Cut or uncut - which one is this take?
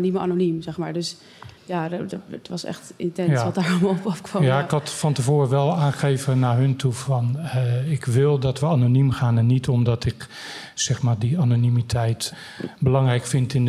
cut